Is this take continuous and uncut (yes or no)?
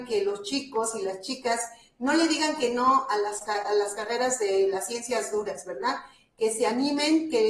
yes